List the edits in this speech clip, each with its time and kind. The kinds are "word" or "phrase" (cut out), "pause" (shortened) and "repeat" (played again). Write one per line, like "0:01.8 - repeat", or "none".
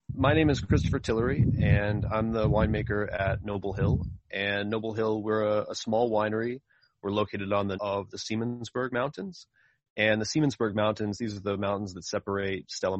0:07.7 - phrase